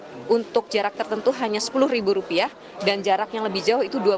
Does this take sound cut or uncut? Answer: uncut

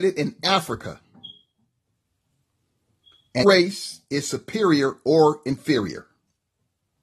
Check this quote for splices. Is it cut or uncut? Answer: cut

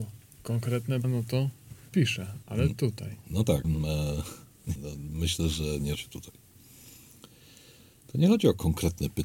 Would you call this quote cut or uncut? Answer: cut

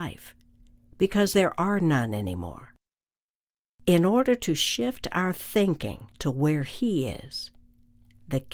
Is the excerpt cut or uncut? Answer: uncut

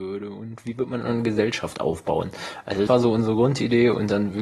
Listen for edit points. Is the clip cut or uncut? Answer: cut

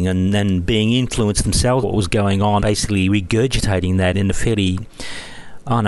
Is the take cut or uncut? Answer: cut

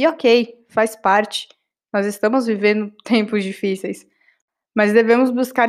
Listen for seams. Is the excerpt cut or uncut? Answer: uncut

